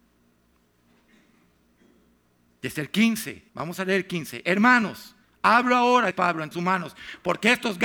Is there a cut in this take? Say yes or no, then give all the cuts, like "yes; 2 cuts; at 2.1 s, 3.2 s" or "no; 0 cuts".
yes; 4 cuts; at 3.5 s, 5.2 s, 6.1 s, 6.5 s